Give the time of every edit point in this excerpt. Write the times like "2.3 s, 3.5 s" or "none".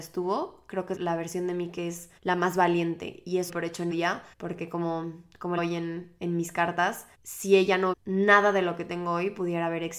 1.0 s, 2.2 s, 3.5 s, 3.9 s, 4.3 s, 5.6 s, 7.1 s, 7.9 s